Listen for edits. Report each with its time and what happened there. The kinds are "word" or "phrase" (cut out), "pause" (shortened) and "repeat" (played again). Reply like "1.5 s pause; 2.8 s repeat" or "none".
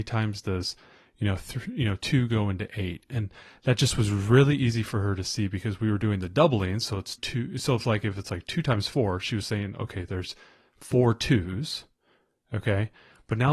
7.2 s word

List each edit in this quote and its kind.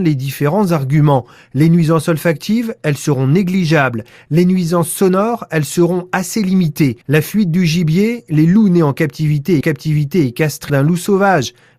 7.0 s pause; 9.6 s repeat; 10.7 s phrase

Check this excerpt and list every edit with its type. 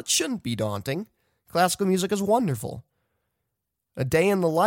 none

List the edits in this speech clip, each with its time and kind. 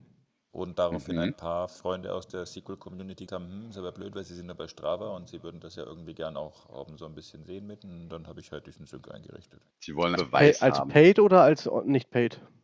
3.3 s word; 9.7 s pause; 10.2 s word

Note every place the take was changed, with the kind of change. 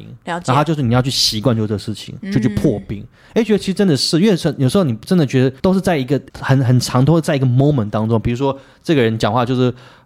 5.6 s pause; 6.3 s pause

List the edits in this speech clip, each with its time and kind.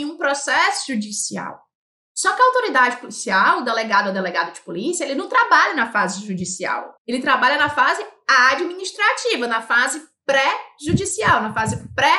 7.0 s pause

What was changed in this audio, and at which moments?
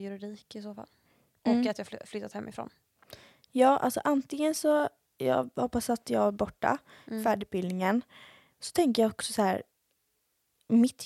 6.3 s word; 7.4 s word

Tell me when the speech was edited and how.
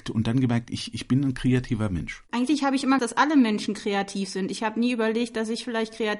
3.0 s word

